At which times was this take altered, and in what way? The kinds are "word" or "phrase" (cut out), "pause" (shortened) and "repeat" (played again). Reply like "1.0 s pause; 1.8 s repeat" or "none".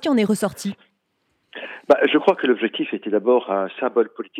none